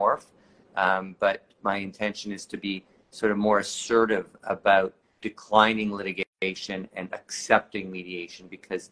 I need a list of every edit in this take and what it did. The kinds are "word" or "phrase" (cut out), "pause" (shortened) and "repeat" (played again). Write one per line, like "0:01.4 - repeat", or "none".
none